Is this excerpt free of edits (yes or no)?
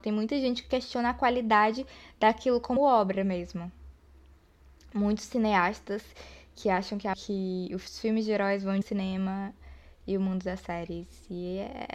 no